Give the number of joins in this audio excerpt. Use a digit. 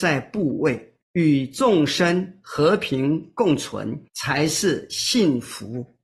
2